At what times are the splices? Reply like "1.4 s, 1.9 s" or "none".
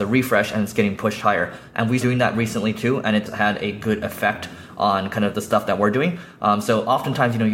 2.0 s, 3.3 s, 5.3 s